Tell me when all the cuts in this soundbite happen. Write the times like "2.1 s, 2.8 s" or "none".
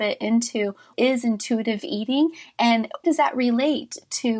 0.9 s, 3.0 s

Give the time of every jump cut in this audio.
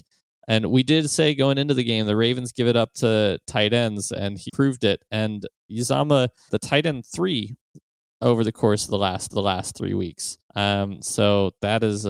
4.5 s, 6.5 s, 9.3 s, 10.4 s

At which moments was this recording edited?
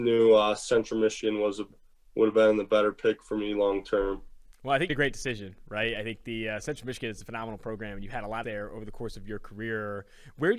4.9 s, 8.4 s

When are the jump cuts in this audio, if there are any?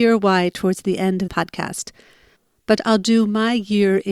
1.3 s, 2.8 s

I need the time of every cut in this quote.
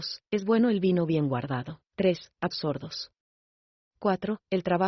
1.9 s, 2.5 s

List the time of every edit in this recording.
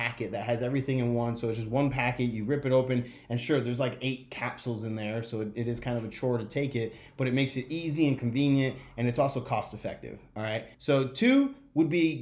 10.7 s

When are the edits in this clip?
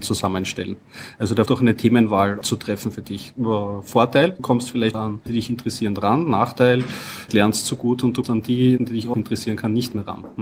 1.5 s, 2.4 s, 4.4 s, 4.9 s, 5.3 s, 7.3 s, 8.2 s, 8.8 s, 9.1 s

